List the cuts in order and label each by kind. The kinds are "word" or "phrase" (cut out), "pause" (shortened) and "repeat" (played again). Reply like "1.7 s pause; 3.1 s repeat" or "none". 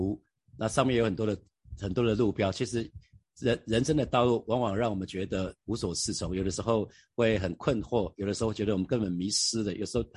none

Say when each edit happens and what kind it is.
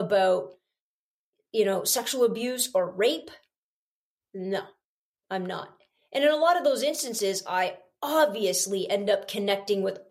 none

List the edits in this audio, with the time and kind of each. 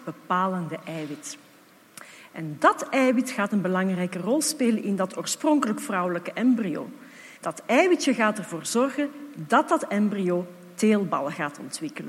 7.4 s pause

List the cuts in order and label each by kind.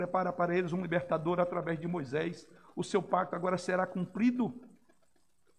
none

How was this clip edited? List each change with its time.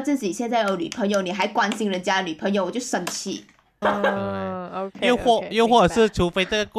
3.8 s word

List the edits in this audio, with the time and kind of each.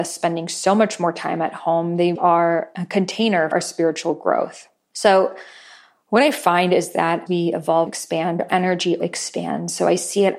2.2 s word; 3.5 s word; 7.3 s word; 7.9 s word; 8.5 s word; 9.0 s word

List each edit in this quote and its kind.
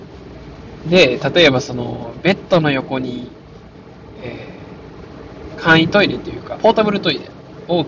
6.6 s phrase

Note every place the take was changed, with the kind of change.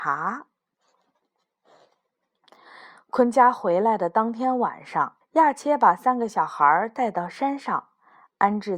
5.2 s pause

